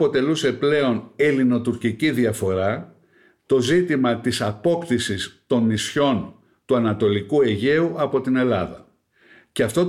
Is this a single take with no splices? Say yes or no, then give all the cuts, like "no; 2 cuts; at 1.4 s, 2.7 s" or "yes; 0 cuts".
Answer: yes; 0 cuts